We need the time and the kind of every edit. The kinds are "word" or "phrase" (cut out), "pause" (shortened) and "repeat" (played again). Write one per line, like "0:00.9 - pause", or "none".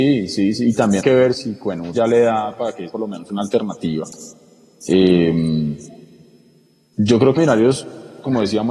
0:01.0 - word
0:01.3 - word
0:01.9 - word
0:02.9 - word
0:07.4 - word